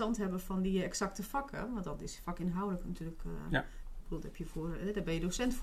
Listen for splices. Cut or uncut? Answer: uncut